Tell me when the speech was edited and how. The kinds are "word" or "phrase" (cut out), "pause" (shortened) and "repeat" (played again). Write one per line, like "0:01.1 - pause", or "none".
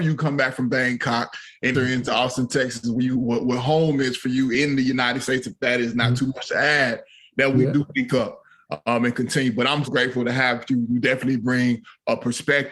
0:01.7 - word
0:09.9 - word